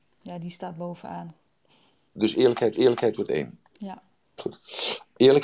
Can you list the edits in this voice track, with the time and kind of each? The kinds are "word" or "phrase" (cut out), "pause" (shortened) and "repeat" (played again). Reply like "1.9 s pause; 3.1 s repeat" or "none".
2.7 s repeat; 4.2 s pause